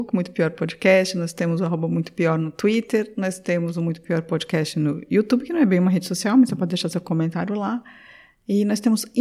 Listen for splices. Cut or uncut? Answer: uncut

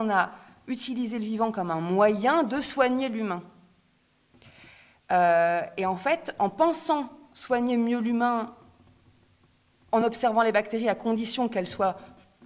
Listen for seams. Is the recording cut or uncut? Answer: uncut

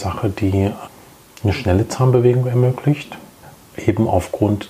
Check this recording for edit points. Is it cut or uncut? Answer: uncut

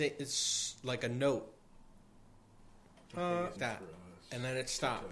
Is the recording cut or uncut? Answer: cut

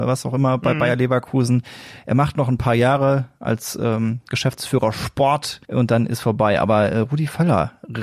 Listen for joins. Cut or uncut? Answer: cut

